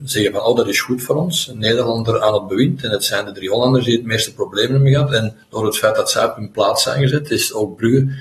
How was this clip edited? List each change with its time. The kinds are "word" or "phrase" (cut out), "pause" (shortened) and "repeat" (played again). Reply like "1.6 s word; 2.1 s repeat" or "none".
none